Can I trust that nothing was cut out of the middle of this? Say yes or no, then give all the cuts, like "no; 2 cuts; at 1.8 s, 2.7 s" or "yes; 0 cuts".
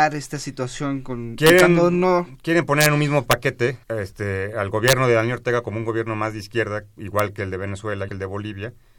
no; 2 cuts; at 3.8 s, 8.1 s